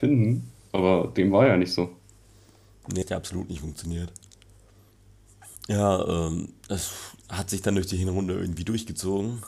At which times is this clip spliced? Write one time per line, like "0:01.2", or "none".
0:03.0
0:05.6